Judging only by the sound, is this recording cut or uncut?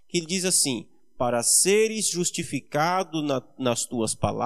uncut